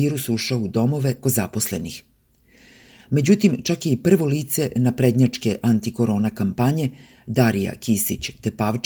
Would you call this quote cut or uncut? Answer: cut